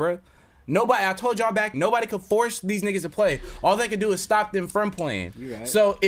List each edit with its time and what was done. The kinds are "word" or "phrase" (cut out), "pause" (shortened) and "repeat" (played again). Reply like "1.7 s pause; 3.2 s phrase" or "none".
1.7 s word